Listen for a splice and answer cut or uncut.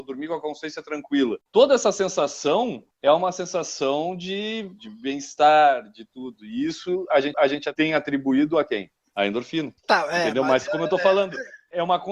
cut